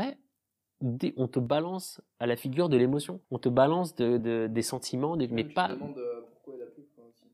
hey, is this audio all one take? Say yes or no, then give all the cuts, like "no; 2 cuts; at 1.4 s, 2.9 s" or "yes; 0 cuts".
no; 2 cuts; at 3.2 s, 4.2 s